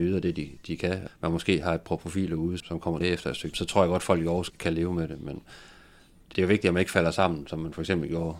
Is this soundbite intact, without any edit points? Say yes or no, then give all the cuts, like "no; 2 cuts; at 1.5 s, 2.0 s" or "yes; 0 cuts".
no; 6 cuts; at 1.1 s, 2.6 s, 3.0 s, 3.5 s, 4.5 s, 6.3 s